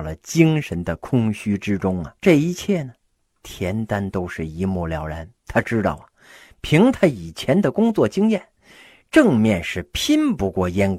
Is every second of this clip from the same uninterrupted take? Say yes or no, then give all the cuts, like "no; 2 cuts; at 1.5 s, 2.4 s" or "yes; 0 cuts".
no; 2 cuts; at 2.2 s, 5.4 s